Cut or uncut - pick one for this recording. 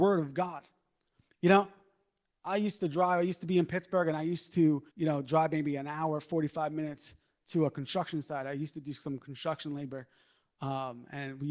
cut